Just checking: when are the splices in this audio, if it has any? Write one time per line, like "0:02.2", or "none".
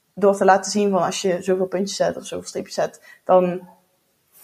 none